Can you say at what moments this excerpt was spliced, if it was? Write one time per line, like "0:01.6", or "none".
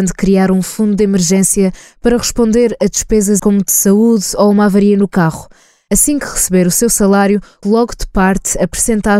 0:03.4
0:07.6